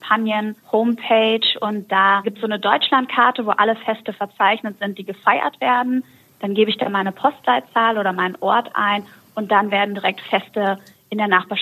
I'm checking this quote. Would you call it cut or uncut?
uncut